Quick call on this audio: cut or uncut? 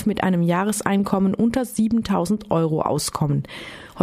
uncut